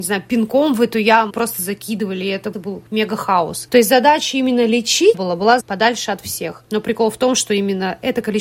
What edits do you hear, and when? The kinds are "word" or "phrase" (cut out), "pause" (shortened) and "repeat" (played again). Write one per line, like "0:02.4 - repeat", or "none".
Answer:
0:01.3 - word
0:02.5 - word
0:05.1 - phrase
0:05.6 - phrase